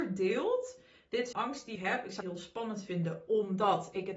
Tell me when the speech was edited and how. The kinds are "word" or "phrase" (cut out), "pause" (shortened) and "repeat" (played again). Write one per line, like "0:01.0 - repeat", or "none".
0:01.3 - word
0:01.8 - word
0:02.2 - word